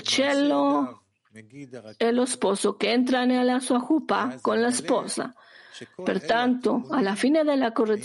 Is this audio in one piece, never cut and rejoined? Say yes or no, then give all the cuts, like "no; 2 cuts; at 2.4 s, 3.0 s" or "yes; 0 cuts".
yes; 0 cuts